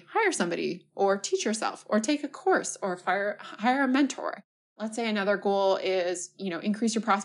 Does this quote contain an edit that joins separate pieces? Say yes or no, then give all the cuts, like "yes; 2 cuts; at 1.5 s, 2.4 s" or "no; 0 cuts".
no; 0 cuts